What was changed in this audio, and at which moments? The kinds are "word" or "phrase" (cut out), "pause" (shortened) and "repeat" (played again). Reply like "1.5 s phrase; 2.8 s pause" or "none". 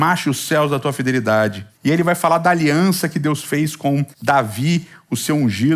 1.7 s pause; 4.1 s pause